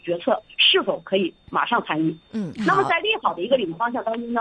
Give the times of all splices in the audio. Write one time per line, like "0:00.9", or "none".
0:02.2